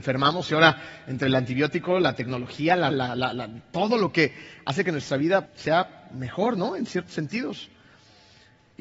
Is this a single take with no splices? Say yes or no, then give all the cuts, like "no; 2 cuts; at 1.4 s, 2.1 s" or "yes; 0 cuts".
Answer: no; 2 cuts; at 2.9 s, 5.5 s